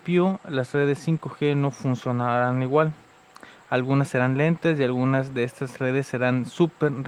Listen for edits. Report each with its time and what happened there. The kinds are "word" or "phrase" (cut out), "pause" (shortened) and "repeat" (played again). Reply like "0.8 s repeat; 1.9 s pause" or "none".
none